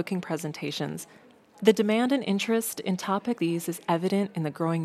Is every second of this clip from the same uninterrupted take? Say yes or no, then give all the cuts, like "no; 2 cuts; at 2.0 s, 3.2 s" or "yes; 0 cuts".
no; 1 cut; at 3.4 s